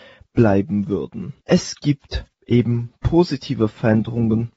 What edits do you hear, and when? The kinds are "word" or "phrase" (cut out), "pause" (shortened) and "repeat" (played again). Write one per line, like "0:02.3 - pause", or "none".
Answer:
0:01.4 - pause
0:02.3 - pause